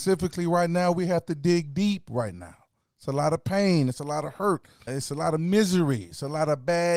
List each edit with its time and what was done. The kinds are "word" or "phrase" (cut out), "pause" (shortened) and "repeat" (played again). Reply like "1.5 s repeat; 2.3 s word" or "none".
4.9 s word